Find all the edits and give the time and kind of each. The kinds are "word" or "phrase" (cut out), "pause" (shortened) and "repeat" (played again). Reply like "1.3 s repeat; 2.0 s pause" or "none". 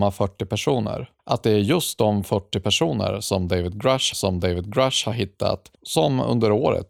1.2 s pause; 4.1 s repeat; 5.7 s pause